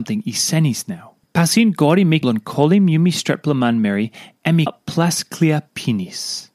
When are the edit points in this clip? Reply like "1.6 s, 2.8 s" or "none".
1.2 s, 2.2 s, 4.7 s